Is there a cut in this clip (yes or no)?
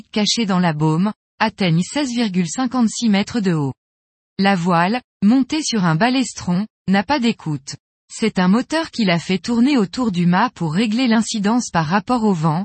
no